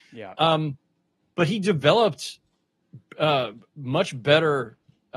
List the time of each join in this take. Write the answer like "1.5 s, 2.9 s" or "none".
none

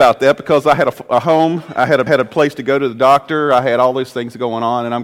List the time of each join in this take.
2.1 s

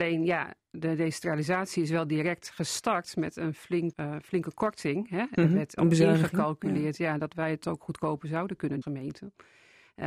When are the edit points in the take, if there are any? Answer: 3.9 s, 8.8 s

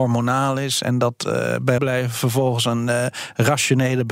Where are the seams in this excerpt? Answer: 1.8 s

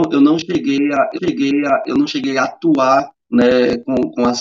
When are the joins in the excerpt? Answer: 1.2 s, 3.2 s

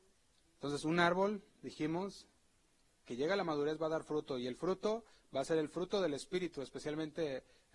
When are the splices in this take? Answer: none

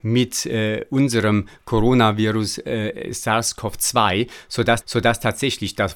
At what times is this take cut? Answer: 4.8 s

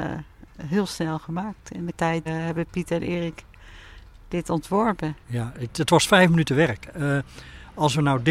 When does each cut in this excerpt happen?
1.9 s, 2.3 s, 5.2 s

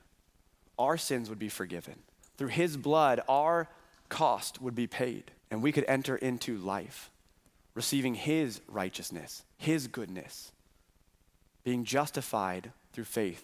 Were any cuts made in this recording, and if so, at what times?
2.2 s, 5.4 s, 9.5 s

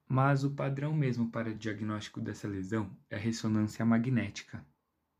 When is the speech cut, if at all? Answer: none

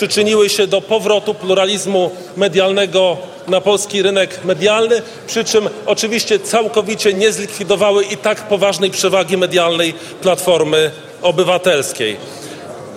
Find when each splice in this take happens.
none

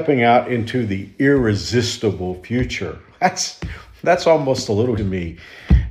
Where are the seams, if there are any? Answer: 5.0 s

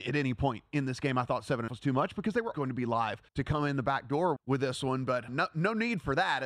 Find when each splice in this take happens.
1.7 s, 2.5 s, 3.3 s, 4.4 s, 5.3 s

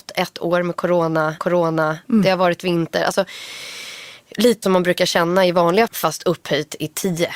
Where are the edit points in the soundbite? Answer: 1.4 s, 4.6 s, 5.9 s

